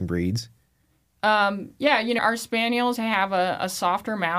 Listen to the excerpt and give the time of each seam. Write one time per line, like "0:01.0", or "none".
0:02.2
0:03.0